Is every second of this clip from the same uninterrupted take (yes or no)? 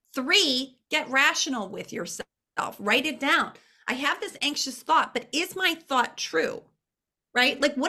yes